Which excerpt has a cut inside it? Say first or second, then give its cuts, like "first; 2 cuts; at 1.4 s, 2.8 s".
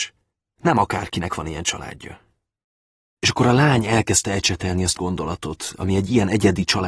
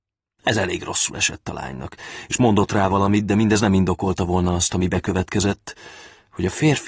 first; 1 cut; at 5.0 s